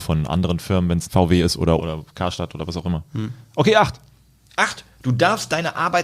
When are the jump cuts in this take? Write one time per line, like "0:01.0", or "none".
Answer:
0:01.1
0:01.8